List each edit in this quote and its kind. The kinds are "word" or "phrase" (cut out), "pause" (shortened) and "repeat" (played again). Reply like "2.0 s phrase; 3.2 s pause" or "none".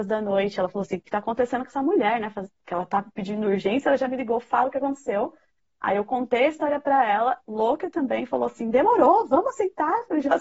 none